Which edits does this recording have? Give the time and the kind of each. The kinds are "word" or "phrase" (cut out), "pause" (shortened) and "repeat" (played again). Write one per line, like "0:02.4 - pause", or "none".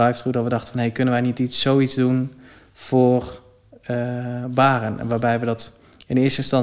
none